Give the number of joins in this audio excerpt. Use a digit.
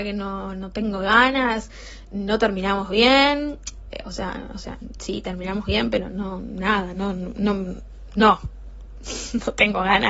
0